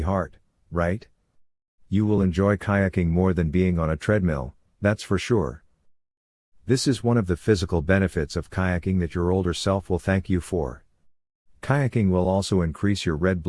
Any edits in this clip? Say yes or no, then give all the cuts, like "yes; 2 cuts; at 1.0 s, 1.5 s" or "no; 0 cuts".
no; 0 cuts